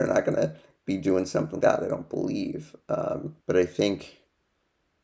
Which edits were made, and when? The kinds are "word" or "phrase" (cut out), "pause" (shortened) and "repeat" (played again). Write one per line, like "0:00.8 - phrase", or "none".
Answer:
0:01.6 - word
0:03.4 - pause